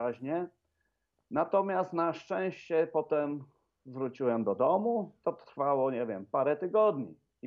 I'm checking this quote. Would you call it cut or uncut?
uncut